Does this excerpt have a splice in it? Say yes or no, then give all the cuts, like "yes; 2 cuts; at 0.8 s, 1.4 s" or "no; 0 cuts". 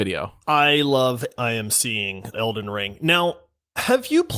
yes; 2 cuts; at 1.3 s, 2.3 s